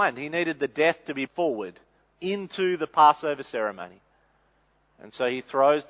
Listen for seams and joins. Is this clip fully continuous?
no; 1 cut; at 1.3 s

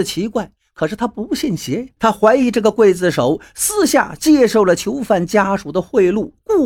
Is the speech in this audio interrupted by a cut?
yes; 1 cut; at 2.0 s

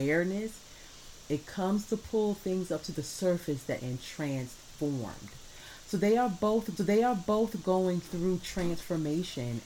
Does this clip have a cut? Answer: yes; 2 cuts; at 3.8 s, 6.8 s

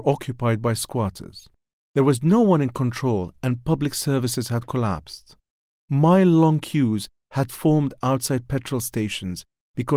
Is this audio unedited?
yes; 0 cuts

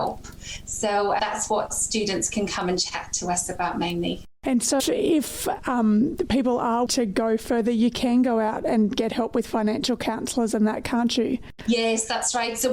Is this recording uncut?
no; 4 cuts; at 1.2 s, 4.8 s, 6.9 s, 11.5 s

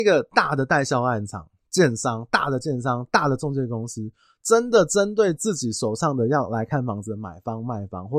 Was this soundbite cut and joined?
no; 0 cuts

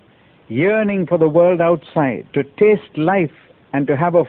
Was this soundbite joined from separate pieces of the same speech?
yes; 1 cut; at 2.3 s

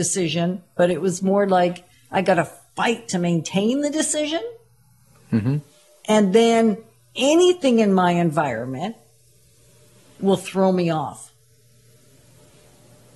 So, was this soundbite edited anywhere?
no; 0 cuts

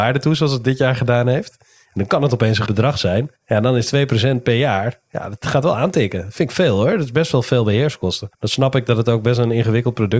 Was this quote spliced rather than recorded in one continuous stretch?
yes; 3 cuts; at 2.7 s, 3.4 s, 8.3 s

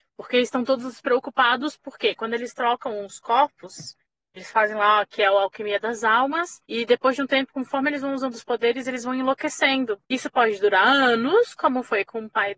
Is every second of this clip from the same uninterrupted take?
no; 3 cuts; at 4.4 s, 6.6 s, 10.0 s

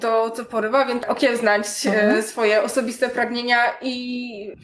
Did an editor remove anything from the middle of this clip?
yes; 1 cut; at 1.0 s

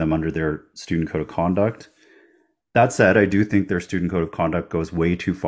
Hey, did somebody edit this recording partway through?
no; 0 cuts

